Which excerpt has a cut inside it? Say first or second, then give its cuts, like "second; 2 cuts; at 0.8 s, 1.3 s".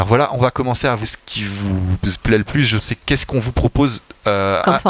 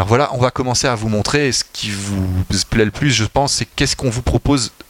first; 2 cuts; at 1.0 s, 2.8 s